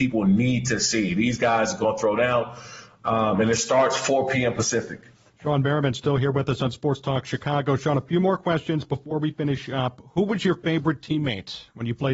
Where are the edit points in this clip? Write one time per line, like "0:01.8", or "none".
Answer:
0:05.1